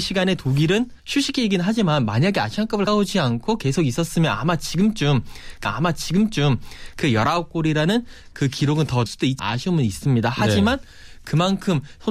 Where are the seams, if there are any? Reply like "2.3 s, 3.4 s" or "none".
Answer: 1.0 s, 2.9 s, 5.6 s, 9.1 s, 9.4 s